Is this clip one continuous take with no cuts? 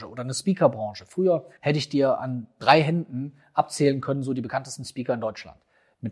no; 1 cut; at 1.6 s

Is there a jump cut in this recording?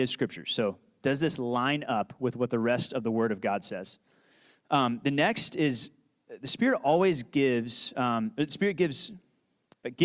no; 0 cuts

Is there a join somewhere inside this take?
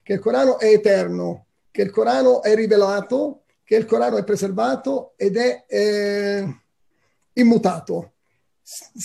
no; 0 cuts

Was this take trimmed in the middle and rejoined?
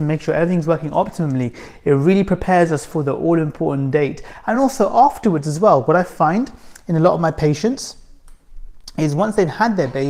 no; 0 cuts

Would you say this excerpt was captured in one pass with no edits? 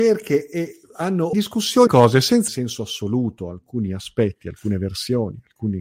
no; 3 cuts; at 1.3 s, 1.9 s, 2.5 s

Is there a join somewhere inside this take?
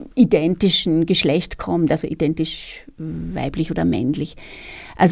no; 0 cuts

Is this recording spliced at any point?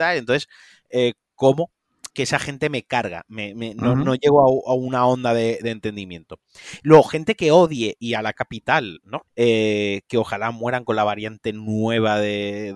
yes; 3 cuts; at 2.1 s, 8.3 s, 9.3 s

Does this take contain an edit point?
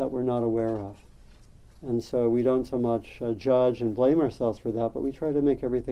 no; 0 cuts

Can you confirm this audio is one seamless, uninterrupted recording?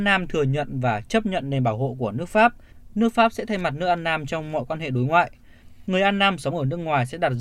yes; 0 cuts

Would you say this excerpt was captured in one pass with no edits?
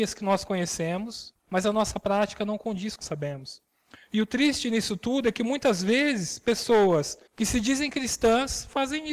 no; 3 cuts; at 1.4 s, 3.0 s, 7.3 s

